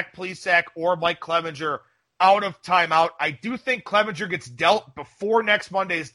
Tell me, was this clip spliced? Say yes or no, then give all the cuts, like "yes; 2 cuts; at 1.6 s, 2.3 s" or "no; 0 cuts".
no; 0 cuts